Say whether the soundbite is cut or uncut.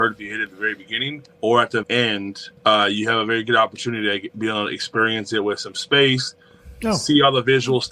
cut